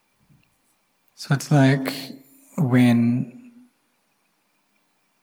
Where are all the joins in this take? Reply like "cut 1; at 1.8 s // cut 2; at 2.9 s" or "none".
none